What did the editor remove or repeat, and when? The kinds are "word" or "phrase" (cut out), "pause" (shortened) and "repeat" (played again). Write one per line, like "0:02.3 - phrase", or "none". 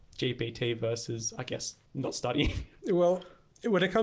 0:01.9 - pause